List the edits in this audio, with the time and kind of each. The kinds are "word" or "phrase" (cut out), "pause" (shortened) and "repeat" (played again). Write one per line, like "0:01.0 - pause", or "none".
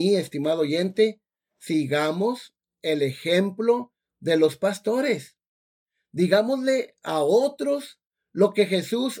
none